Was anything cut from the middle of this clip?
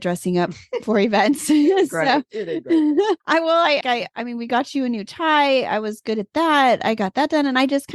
yes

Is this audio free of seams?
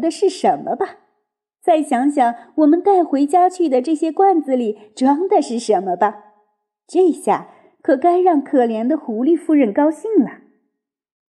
yes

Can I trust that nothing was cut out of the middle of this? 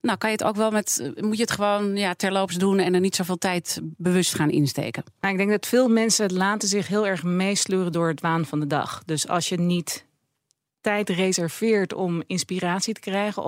yes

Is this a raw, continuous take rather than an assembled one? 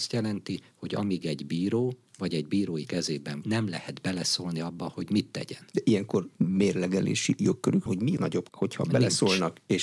no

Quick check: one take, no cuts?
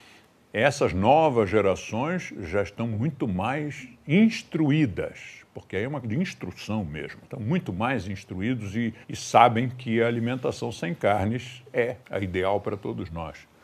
no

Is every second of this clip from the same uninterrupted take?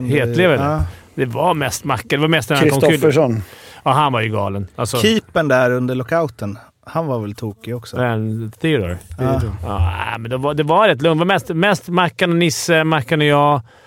yes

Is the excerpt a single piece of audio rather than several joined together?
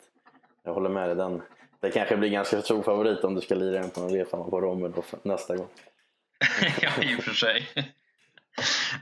yes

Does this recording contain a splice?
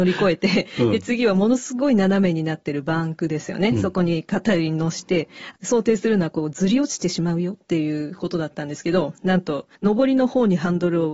yes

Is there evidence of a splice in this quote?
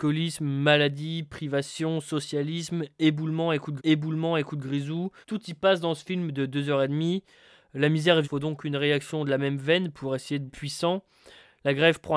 yes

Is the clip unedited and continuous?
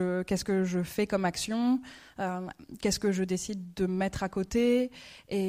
yes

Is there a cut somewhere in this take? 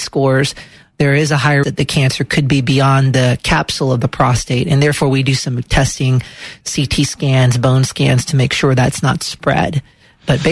yes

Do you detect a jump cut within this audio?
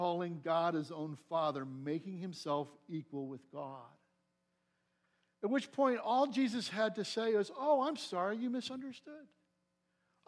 no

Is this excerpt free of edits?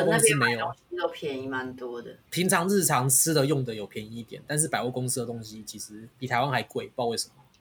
no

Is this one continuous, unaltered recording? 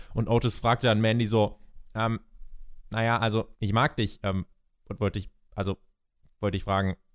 no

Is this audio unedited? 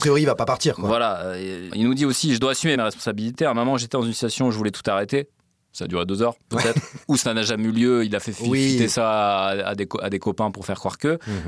no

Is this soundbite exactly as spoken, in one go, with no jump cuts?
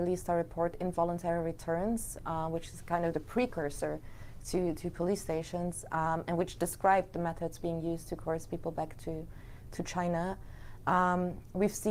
yes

